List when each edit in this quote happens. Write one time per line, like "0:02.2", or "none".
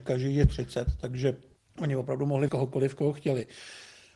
0:01.6
0:02.5